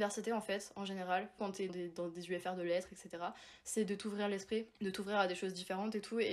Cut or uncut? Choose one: cut